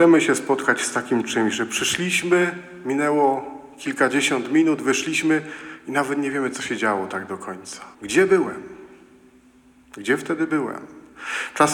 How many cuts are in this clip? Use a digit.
1